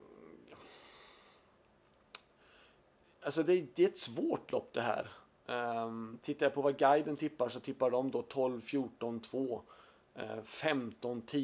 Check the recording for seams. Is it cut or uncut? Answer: uncut